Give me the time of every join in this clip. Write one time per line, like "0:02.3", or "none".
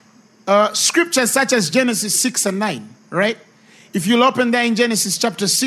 0:03.0